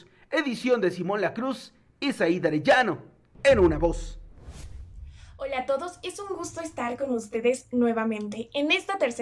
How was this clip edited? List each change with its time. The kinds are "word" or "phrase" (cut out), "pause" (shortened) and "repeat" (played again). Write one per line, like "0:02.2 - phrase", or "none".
none

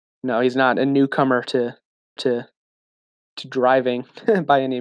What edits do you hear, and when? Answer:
0:02.2 - repeat

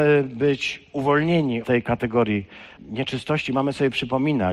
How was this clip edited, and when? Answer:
0:01.6 - word
0:02.8 - word

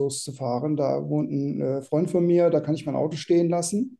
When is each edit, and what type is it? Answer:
none

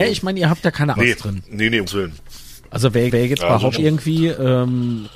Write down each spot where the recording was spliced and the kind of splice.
0:01.0 - phrase
0:01.9 - word
0:03.1 - repeat
0:03.8 - word

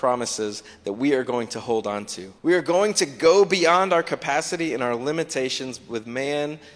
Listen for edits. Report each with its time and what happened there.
0:02.4 - pause

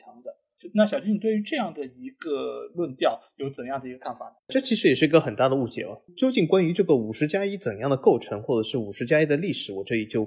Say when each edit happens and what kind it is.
0:04.4 - pause

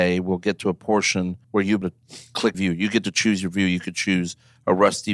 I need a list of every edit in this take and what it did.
0:01.4 - pause
0:01.8 - word
0:02.5 - word

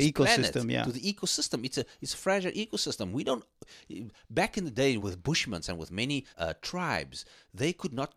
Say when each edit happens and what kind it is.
0:05.0 - word
0:06.3 - pause

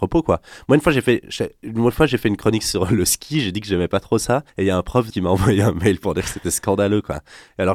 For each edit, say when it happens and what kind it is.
0:04.5 - pause
0:05.1 - word

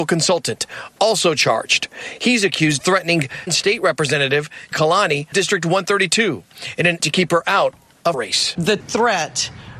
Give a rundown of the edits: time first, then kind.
0:02.8 - word
0:03.5 - word
0:04.7 - word
0:05.3 - word
0:07.0 - word
0:08.1 - word
0:08.8 - word

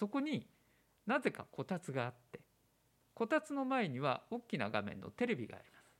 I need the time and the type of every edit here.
none

